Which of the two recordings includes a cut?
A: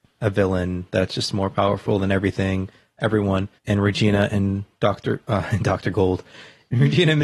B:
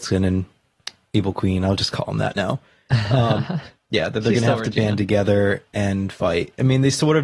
A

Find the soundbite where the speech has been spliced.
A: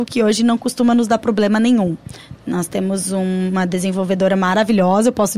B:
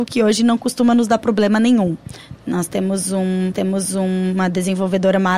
B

